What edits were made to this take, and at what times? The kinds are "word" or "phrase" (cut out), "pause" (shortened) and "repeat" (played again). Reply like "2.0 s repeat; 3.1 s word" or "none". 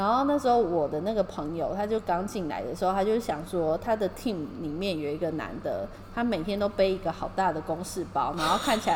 none